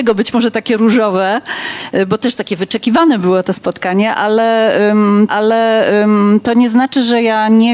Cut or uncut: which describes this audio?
cut